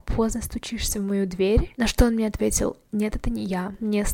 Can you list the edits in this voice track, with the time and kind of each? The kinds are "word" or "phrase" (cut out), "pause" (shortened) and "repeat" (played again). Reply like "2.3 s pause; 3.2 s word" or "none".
none